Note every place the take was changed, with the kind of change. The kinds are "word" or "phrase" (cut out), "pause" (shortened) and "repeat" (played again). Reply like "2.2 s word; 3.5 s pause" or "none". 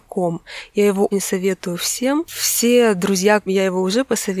1.1 s word; 3.5 s word